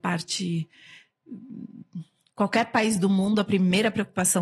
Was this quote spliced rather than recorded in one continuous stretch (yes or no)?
no